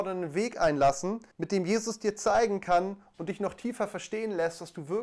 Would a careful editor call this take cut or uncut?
cut